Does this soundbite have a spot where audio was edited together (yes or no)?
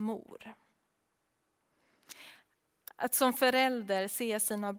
no